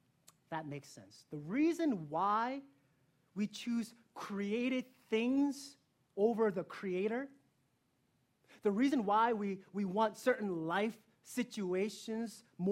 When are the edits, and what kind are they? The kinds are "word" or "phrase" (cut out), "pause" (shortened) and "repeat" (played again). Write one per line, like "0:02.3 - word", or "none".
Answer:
none